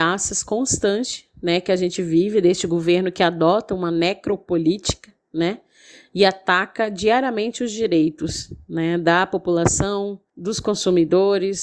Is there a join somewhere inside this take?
no; 0 cuts

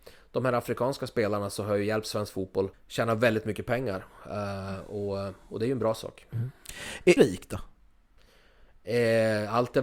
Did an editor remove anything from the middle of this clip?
yes; 2 cuts; at 2.7 s, 7.2 s

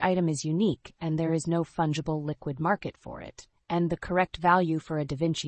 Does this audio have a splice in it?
no; 0 cuts

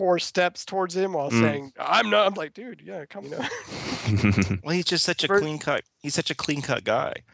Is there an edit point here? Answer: yes; 2 cuts; at 2.3 s, 3.2 s

